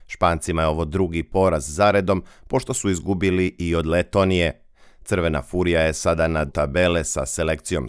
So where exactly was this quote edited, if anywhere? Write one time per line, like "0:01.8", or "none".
0:06.5

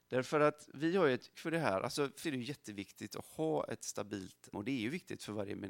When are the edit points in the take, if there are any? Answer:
0:01.3
0:02.2
0:04.5

